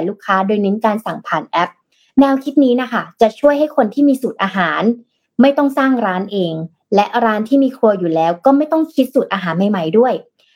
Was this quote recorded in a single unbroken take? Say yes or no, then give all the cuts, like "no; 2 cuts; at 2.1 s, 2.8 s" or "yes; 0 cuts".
yes; 0 cuts